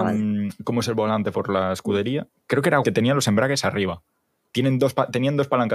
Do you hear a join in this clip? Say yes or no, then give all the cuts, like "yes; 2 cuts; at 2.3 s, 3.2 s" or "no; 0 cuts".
yes; 3 cuts; at 1.3 s, 2.3 s, 2.8 s